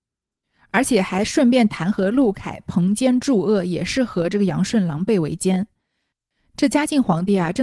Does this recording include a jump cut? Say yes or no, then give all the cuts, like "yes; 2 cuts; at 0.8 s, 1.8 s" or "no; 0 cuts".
no; 0 cuts